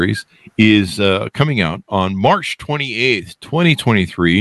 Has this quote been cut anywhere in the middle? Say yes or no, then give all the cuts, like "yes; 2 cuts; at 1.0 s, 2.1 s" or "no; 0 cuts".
no; 0 cuts